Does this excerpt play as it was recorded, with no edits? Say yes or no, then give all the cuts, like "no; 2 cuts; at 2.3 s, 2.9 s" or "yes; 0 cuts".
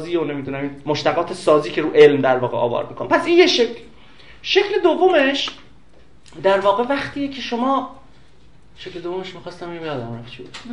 yes; 0 cuts